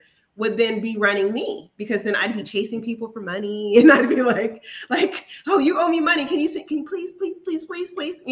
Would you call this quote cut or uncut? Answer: uncut